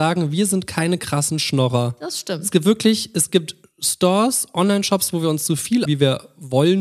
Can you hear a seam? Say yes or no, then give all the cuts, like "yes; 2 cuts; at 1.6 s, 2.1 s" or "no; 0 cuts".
yes; 1 cut; at 5.9 s